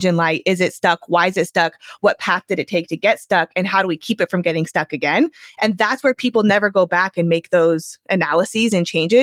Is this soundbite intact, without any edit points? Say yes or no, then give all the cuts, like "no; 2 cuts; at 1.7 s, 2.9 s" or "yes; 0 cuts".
yes; 0 cuts